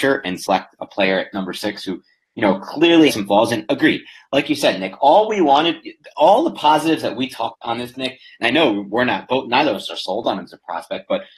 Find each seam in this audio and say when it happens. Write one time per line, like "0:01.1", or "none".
0:03.1
0:07.5
0:07.9